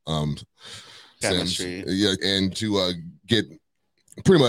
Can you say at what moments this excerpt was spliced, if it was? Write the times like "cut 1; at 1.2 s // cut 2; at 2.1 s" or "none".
cut 1; at 1.2 s // cut 2; at 2.2 s // cut 3; at 2.5 s